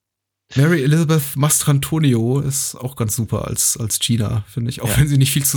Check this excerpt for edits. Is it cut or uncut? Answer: uncut